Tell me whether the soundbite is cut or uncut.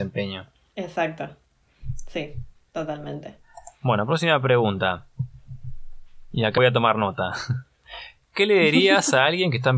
cut